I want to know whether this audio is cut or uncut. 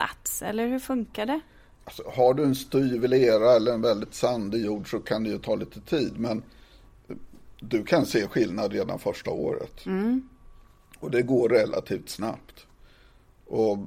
uncut